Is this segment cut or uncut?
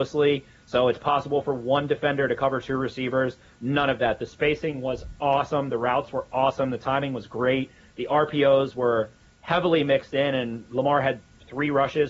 uncut